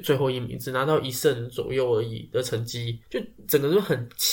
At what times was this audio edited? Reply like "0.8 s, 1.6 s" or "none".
3.0 s